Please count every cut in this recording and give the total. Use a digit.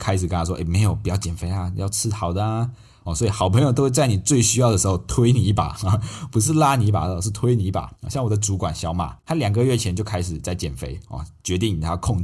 2